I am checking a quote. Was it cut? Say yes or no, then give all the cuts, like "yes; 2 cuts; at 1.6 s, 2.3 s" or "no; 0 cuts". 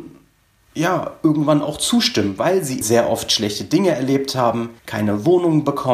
yes; 2 cuts; at 2.8 s, 4.8 s